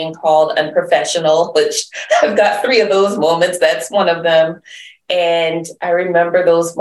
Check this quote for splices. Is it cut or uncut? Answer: uncut